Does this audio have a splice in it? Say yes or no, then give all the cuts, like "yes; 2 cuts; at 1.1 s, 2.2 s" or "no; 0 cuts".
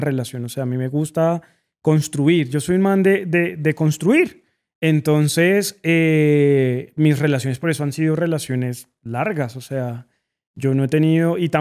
no; 0 cuts